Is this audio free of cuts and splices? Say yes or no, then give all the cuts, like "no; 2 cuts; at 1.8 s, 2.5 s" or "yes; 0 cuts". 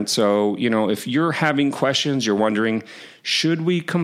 yes; 0 cuts